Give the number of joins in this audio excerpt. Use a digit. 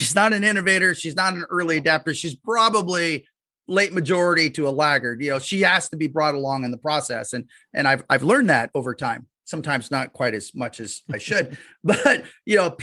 1